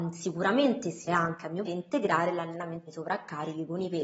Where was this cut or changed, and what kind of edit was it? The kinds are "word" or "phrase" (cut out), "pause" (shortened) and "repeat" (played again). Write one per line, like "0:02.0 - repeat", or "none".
0:01.1 - word
0:01.6 - word
0:02.9 - word